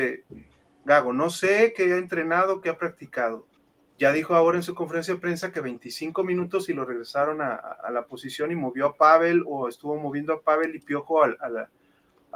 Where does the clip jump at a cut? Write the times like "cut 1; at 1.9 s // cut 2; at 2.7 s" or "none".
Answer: cut 1; at 3.6 s